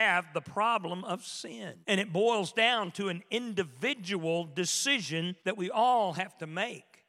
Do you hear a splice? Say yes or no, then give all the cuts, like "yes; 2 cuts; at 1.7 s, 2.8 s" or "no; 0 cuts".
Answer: yes; 2 cuts; at 1.8 s, 5.4 s